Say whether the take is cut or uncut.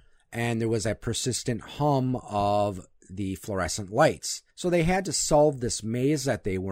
cut